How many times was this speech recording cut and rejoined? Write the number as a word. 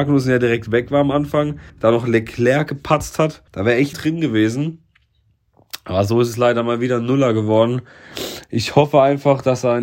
three